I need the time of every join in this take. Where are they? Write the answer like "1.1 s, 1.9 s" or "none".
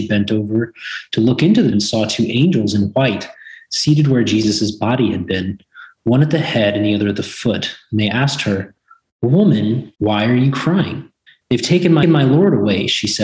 1.7 s, 10.0 s, 11.3 s, 12.0 s